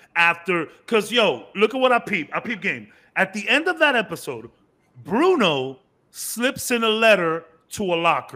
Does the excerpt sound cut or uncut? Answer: uncut